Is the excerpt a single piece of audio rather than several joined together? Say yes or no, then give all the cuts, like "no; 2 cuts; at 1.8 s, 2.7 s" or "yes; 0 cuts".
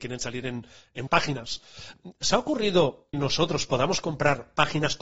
no; 3 cuts; at 1.1 s, 2.3 s, 3.1 s